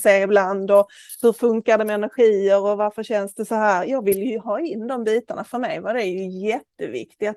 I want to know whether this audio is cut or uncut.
uncut